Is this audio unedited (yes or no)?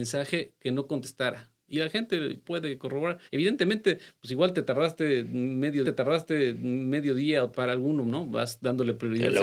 no